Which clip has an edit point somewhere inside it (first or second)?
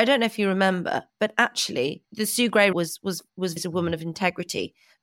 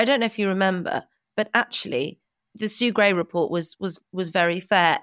first